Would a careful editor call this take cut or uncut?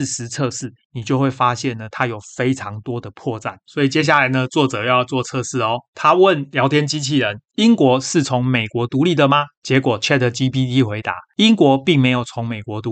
uncut